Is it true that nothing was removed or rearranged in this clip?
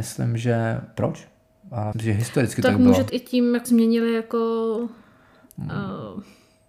no; 4 cuts; at 1.0 s, 1.9 s, 3.1 s, 3.6 s

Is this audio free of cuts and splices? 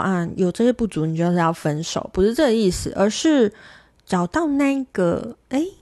yes; 0 cuts

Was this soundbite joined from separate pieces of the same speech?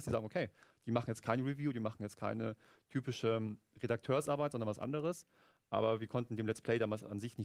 no; 0 cuts

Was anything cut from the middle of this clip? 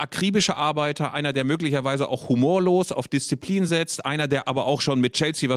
no; 0 cuts

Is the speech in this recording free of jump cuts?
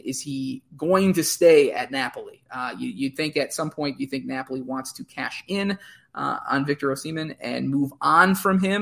yes; 0 cuts

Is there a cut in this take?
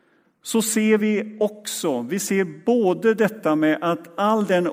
no; 0 cuts

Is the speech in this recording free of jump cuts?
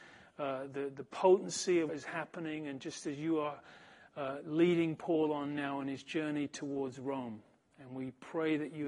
no; 1 cut; at 1.9 s

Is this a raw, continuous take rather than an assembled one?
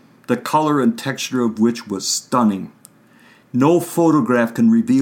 yes; 0 cuts

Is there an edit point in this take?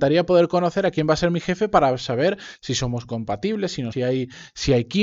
yes; 1 cut; at 3.9 s

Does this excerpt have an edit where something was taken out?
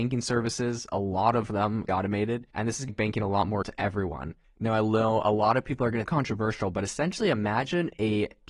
yes; 5 cuts; at 1.9 s, 2.5 s, 2.9 s, 3.6 s, 6.1 s

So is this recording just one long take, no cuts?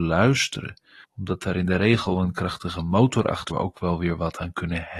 no; 2 cuts; at 1.0 s, 3.5 s

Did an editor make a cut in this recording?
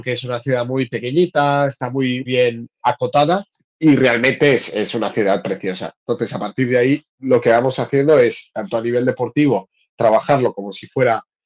yes; 4 cuts; at 2.3 s, 2.8 s, 3.5 s, 7.1 s

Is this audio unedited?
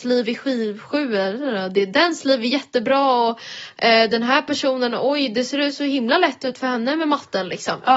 yes; 0 cuts

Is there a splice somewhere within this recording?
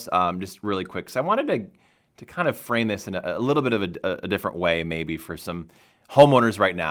no; 0 cuts

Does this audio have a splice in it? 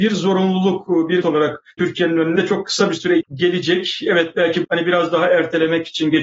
yes; 5 cuts; at 1.2 s, 1.8 s, 2.4 s, 3.2 s, 4.6 s

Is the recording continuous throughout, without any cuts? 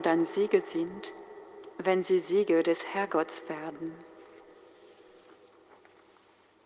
yes; 0 cuts

